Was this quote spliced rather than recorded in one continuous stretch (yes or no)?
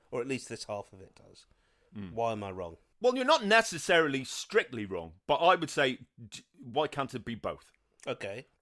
no